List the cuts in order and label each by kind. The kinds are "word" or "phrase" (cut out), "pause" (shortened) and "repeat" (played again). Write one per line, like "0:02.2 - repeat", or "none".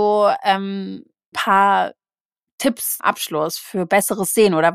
0:01.3 - word
0:03.0 - word